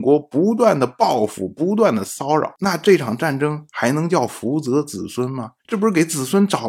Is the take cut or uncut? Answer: cut